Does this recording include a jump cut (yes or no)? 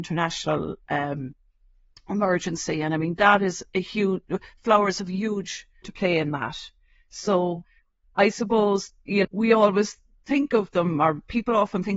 yes